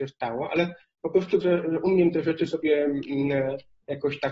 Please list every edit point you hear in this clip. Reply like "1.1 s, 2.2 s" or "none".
1.4 s